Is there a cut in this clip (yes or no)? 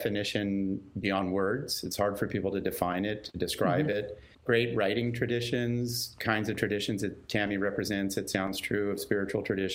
yes